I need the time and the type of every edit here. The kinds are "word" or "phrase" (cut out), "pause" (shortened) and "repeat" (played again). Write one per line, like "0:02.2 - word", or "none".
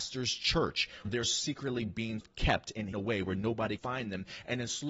0:01.0 - word
0:02.2 - word
0:02.9 - word
0:03.8 - word